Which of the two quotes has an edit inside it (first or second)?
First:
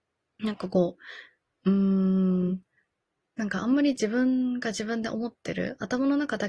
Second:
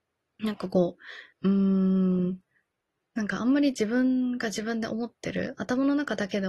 second